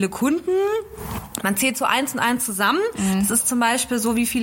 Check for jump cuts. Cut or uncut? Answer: uncut